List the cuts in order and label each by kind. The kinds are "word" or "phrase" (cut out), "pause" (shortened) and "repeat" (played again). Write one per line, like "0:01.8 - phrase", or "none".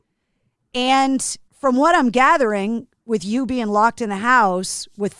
0:01.5 - pause